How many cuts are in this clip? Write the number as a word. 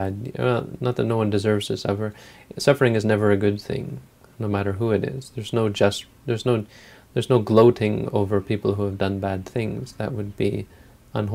zero